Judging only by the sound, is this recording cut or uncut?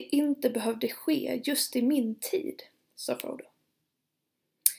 uncut